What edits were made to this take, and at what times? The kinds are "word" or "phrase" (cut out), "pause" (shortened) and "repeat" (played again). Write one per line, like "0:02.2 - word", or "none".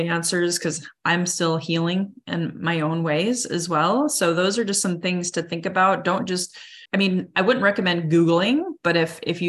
0:06.9 - pause